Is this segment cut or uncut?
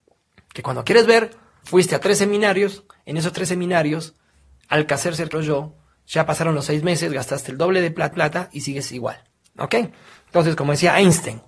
cut